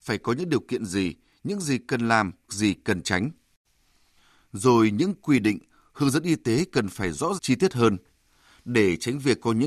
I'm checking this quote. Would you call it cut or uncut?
cut